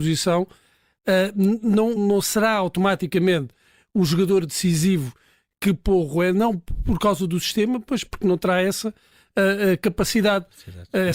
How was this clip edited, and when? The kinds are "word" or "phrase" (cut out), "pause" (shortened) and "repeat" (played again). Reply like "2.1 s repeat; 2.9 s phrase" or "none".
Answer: 2.0 s word